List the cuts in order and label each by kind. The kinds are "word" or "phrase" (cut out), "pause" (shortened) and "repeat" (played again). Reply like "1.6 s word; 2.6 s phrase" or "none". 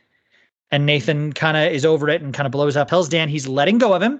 2.9 s word